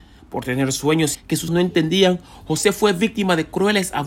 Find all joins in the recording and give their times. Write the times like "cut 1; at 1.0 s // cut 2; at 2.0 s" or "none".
cut 1; at 1.1 s // cut 2; at 1.5 s